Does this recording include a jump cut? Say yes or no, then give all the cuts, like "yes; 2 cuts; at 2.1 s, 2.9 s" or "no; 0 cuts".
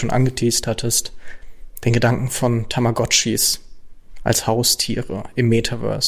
no; 0 cuts